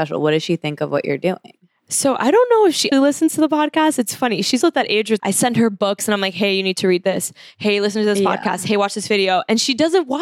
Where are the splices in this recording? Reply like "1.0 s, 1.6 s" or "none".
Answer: 2.9 s, 4.6 s, 5.2 s